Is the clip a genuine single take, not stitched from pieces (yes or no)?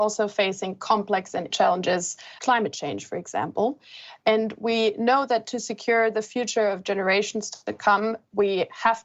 no